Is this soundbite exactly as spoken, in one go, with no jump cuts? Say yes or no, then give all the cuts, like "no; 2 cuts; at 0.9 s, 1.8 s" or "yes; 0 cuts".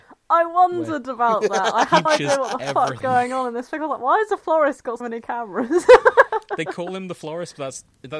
no; 3 cuts; at 2.1 s, 3.0 s, 5.0 s